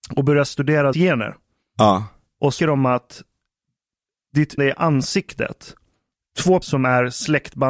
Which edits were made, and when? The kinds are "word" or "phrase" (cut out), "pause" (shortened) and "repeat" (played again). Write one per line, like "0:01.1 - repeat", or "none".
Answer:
0:00.9 - word
0:02.6 - word
0:04.6 - word
0:06.6 - word